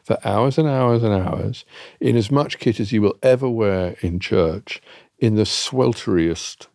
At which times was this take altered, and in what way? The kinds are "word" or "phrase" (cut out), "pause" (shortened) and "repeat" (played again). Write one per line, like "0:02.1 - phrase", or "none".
none